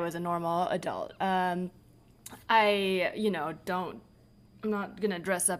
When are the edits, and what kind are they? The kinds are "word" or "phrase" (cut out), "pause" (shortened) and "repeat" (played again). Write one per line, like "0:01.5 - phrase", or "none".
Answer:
none